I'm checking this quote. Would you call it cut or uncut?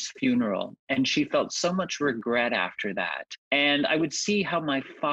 cut